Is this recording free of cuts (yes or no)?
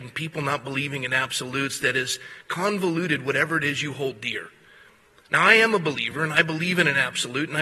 yes